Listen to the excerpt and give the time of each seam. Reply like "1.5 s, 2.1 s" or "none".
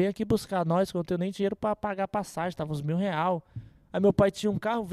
none